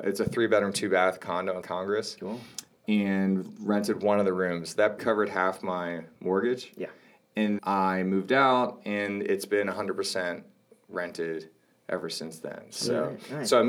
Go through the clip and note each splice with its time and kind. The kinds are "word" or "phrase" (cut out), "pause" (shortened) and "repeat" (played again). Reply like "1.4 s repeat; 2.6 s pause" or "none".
1.6 s word; 5.0 s word; 7.6 s word